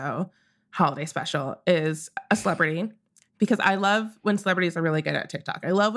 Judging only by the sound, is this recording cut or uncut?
uncut